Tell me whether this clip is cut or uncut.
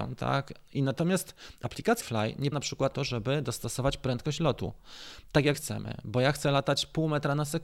cut